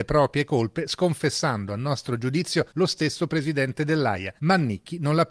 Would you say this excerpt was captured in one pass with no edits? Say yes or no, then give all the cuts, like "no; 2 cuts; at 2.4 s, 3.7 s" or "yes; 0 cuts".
no; 2 cuts; at 2.7 s, 4.4 s